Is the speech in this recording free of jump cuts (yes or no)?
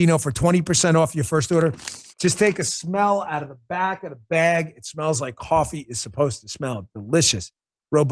no